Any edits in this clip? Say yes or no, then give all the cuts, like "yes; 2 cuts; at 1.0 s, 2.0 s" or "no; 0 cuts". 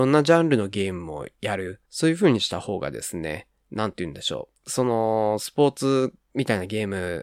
yes; 2 cuts; at 1.9 s, 4.6 s